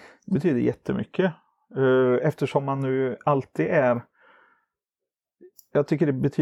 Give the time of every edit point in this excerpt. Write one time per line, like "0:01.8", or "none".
none